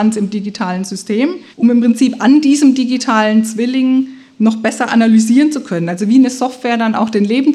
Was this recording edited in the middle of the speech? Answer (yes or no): yes